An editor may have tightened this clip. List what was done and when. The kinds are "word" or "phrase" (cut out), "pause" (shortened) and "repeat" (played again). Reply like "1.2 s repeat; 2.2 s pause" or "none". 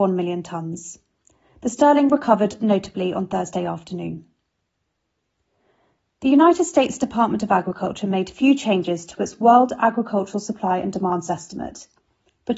none